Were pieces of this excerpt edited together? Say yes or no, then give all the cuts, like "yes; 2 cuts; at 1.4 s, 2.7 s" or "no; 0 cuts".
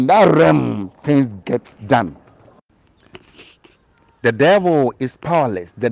yes; 1 cut; at 1.8 s